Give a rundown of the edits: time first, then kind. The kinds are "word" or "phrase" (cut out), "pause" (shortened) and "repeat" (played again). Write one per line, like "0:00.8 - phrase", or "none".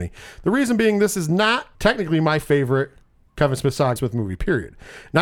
0:01.7 - pause
0:04.0 - phrase